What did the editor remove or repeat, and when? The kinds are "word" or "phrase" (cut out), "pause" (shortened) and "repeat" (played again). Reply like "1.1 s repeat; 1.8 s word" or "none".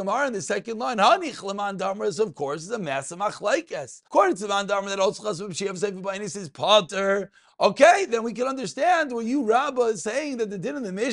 4.1 s pause